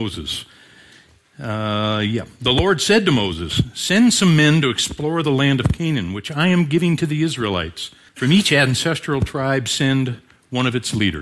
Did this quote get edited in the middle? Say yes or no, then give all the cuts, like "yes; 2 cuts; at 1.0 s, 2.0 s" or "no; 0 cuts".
yes; 1 cut; at 8.1 s